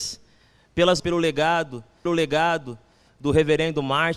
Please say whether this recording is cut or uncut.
cut